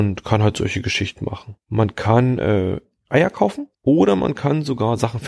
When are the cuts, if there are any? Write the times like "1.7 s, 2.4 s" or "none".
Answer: 3.7 s